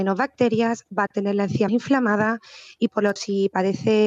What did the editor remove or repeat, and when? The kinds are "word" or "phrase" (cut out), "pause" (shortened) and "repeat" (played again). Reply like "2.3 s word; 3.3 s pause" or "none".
1.1 s word; 1.7 s word; 3.2 s word